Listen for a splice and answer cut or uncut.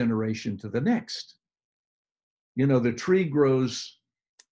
uncut